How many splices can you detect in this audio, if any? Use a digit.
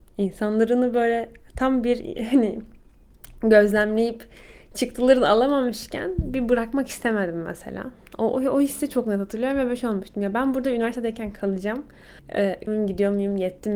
1